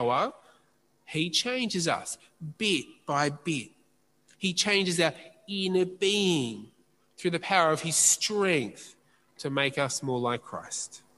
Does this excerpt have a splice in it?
no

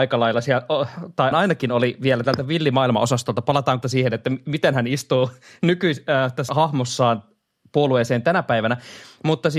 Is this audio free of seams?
no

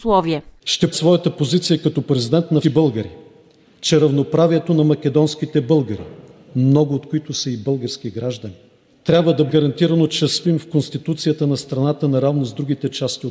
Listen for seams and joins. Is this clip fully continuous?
no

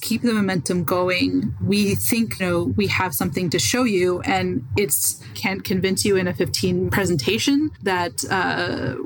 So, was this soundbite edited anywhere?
yes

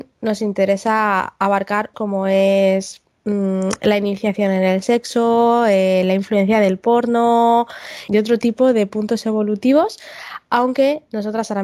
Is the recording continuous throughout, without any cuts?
no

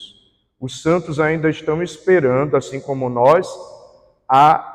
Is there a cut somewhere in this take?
no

